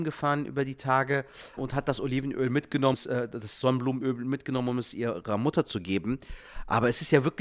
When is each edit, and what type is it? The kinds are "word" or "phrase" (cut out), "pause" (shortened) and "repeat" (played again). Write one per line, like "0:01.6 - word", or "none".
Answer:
0:01.6 - word
0:02.9 - word